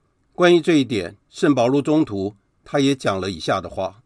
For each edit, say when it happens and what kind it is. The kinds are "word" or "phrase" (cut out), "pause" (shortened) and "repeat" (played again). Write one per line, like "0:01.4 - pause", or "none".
0:01.2 - pause